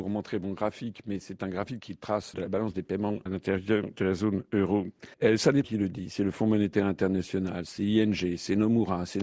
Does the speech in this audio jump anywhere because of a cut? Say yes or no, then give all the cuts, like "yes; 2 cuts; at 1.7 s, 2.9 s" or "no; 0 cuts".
yes; 4 cuts; at 2.3 s, 3.3 s, 5.1 s, 5.6 s